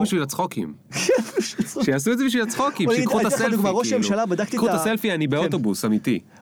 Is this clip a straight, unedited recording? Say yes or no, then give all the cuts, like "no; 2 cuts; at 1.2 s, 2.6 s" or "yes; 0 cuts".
yes; 0 cuts